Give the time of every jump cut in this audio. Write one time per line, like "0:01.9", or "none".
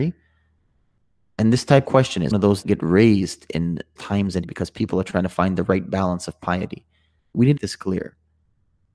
0:01.8
0:02.3
0:02.6
0:04.0
0:04.4
0:07.6